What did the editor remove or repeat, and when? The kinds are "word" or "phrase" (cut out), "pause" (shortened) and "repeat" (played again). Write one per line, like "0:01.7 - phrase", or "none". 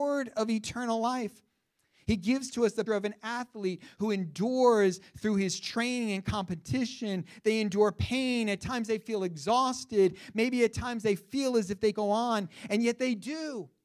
0:02.9 - word
0:11.9 - word